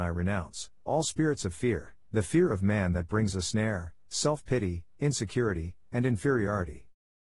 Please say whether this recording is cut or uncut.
uncut